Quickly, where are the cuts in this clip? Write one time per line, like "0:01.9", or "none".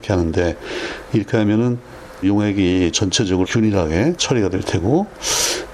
0:02.2
0:03.4
0:04.2